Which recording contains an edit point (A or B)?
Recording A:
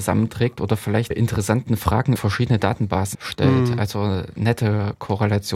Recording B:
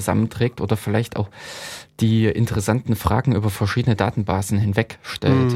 A